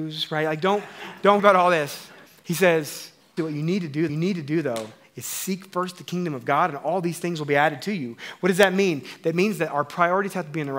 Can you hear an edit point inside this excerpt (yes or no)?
yes